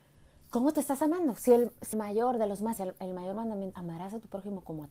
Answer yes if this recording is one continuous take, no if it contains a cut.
no